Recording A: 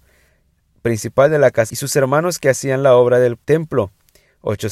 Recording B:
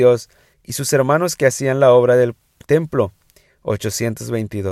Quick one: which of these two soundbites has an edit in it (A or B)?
A